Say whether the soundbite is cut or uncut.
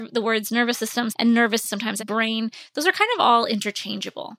cut